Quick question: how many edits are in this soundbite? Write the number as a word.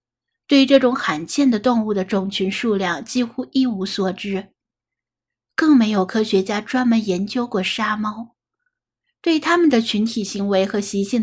zero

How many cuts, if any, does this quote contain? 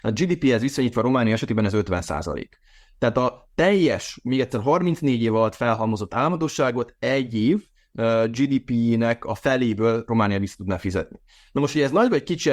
zero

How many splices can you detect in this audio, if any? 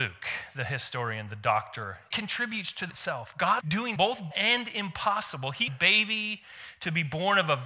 six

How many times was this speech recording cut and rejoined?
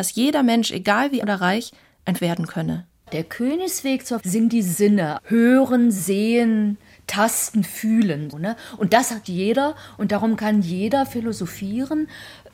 six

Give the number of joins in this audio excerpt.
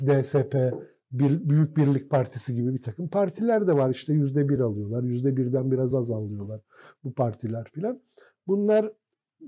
zero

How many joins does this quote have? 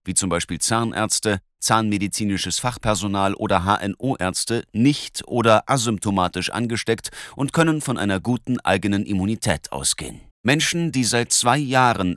one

